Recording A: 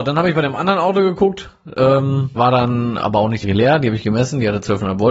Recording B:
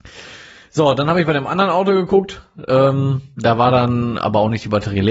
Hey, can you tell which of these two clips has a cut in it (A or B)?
A